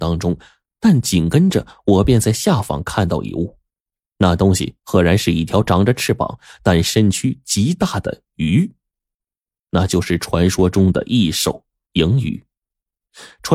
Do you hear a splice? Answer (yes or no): yes